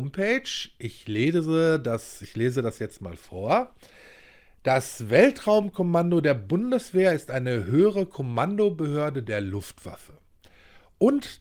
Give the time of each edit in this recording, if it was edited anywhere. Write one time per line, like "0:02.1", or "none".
none